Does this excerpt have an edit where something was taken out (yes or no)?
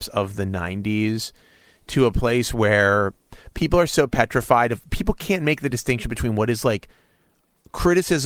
no